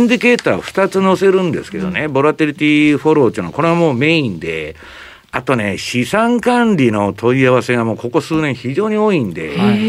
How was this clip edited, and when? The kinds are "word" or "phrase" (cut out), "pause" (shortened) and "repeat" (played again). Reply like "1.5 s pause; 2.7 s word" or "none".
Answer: none